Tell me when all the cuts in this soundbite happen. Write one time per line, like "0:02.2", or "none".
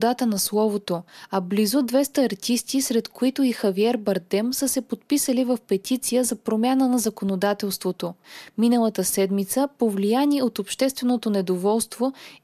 none